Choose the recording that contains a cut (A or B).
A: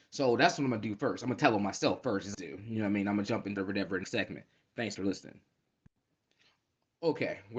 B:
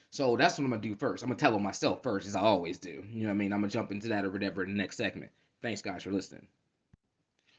A